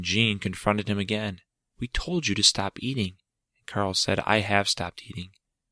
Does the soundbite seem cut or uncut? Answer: uncut